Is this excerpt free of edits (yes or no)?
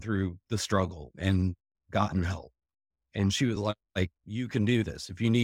yes